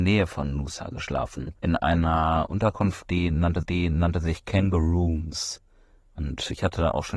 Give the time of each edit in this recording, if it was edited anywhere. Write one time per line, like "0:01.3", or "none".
0:01.6
0:03.6